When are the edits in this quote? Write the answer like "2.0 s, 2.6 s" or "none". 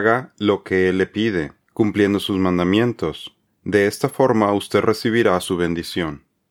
none